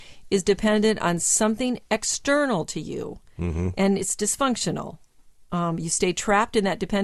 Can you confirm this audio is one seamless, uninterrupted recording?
yes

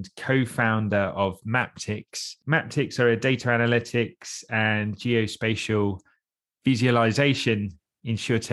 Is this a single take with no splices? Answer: yes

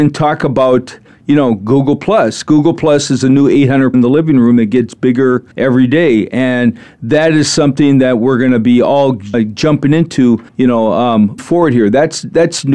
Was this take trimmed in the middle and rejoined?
yes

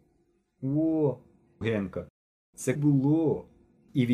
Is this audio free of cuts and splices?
no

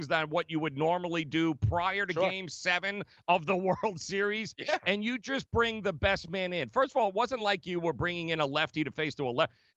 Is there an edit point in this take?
no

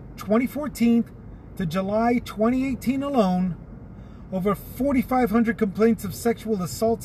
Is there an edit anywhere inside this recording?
no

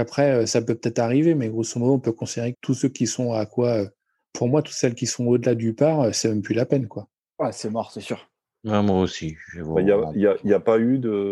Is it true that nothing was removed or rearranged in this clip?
no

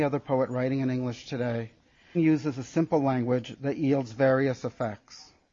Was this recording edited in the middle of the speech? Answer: yes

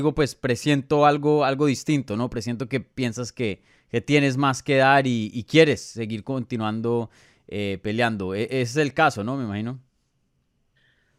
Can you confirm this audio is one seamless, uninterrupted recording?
yes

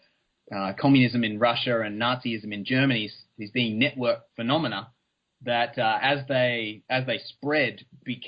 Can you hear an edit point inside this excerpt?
yes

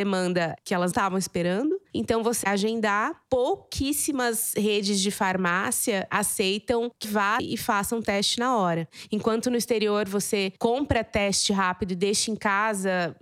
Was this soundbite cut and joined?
yes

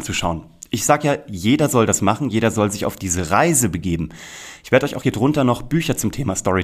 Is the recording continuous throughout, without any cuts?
yes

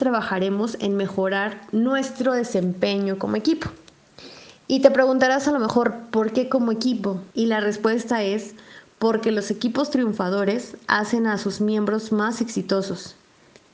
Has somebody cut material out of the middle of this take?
yes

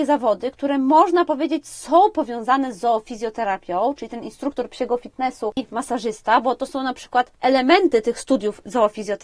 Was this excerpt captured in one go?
yes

